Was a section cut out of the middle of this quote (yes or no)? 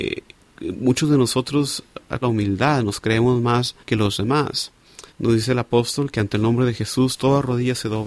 yes